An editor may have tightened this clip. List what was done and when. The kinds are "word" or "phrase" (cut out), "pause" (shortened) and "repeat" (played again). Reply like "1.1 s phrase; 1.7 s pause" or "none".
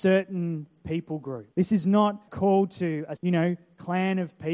1.5 s pause; 2.3 s word; 3.2 s word